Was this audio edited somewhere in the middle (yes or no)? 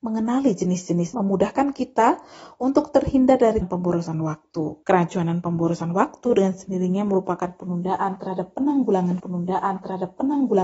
yes